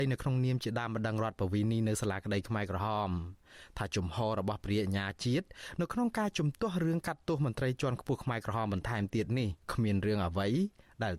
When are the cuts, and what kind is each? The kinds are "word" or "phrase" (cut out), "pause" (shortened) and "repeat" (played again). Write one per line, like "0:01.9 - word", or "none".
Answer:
0:09.6 - pause